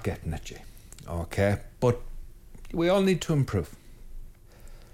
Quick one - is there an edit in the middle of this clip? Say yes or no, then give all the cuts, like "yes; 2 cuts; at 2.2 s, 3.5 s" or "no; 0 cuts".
no; 0 cuts